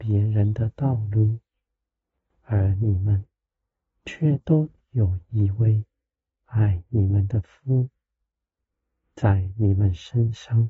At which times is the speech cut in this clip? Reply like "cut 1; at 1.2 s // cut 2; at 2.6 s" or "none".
none